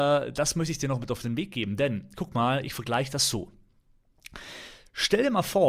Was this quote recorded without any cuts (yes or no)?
yes